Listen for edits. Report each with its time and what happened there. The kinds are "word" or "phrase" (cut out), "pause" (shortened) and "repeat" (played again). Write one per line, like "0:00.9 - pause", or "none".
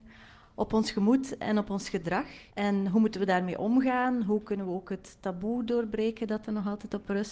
0:02.5 - pause